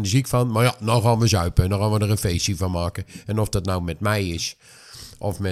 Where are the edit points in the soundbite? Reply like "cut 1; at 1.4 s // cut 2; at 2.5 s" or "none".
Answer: none